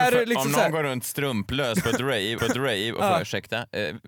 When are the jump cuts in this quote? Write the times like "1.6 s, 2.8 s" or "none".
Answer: 2.4 s